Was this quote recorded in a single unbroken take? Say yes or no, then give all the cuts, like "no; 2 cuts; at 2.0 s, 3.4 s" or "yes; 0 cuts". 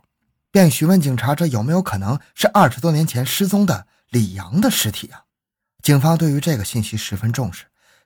no; 1 cut; at 5.3 s